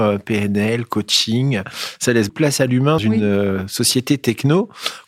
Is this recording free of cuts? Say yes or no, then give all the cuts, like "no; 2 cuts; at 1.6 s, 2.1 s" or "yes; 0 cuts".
no; 2 cuts; at 2.3 s, 3.0 s